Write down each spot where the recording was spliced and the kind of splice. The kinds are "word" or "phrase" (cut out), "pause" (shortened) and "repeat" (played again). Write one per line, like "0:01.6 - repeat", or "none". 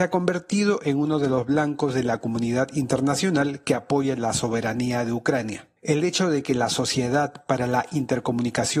0:05.8 - pause